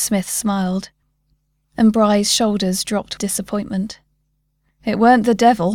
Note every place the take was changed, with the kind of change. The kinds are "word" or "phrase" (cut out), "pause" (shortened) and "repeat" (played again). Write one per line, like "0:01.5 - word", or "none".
0:03.2 - word